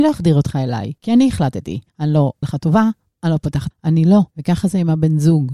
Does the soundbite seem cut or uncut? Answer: cut